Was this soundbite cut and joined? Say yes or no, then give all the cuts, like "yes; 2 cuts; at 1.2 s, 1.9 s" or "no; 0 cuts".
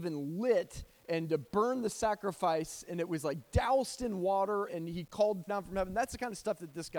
yes; 2 cuts; at 4.7 s, 5.5 s